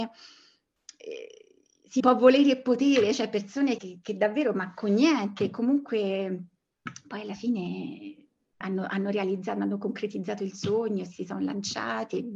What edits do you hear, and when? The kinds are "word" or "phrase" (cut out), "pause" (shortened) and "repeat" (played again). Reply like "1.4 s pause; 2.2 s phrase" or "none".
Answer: 2.0 s word; 3.8 s word; 8.6 s word